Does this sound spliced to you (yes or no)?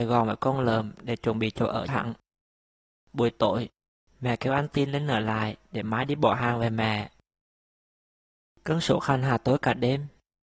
yes